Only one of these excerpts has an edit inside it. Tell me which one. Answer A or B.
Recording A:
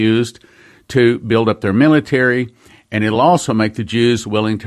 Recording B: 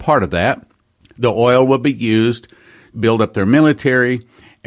B